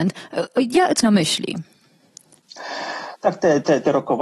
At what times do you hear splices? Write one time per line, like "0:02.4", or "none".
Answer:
0:01.0